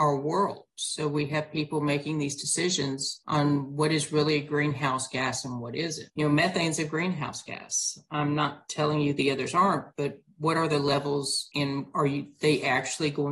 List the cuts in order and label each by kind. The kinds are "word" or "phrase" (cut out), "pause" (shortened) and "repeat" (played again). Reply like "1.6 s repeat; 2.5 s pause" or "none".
6.1 s pause